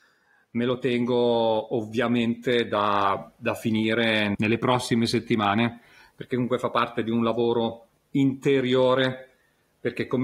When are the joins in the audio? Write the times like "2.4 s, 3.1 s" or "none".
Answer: none